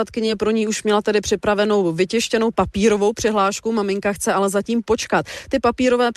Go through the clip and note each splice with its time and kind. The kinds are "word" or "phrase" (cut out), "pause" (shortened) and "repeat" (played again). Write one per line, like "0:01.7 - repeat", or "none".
none